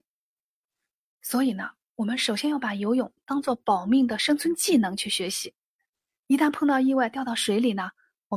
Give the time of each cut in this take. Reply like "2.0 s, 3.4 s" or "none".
none